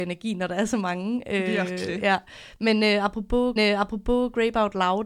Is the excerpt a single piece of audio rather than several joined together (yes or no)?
no